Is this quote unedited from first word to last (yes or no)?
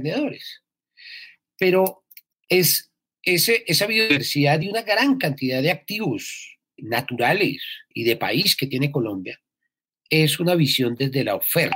yes